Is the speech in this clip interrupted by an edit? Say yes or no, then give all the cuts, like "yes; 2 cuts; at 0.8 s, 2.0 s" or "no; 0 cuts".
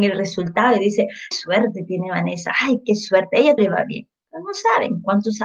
yes; 2 cuts; at 1.3 s, 3.6 s